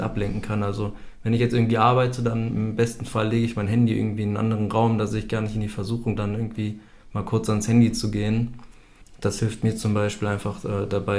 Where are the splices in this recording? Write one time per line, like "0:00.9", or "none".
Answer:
0:06.2